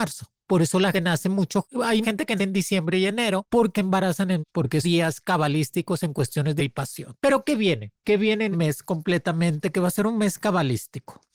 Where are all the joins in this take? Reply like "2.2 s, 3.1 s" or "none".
0.9 s, 2.0 s, 2.4 s, 3.7 s, 4.4 s, 4.8 s, 6.6 s, 8.5 s